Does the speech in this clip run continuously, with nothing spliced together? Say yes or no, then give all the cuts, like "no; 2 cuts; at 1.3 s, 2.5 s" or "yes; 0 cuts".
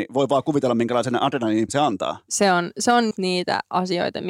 no; 2 cuts; at 1.7 s, 3.1 s